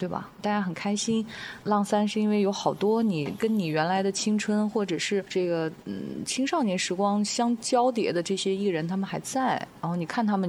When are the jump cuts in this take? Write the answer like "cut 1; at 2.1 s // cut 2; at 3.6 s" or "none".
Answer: cut 1; at 1.6 s